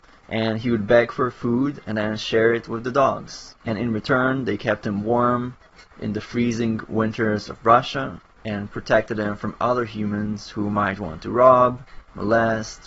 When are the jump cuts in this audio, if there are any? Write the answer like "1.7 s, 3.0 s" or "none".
none